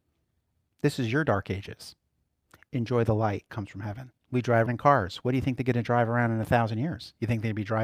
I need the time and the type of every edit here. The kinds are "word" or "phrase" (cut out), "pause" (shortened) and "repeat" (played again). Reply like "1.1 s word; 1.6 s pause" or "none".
3.5 s word; 4.2 s pause; 4.7 s word